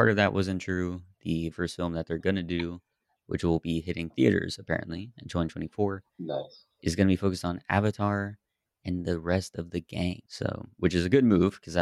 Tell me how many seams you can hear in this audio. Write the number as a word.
two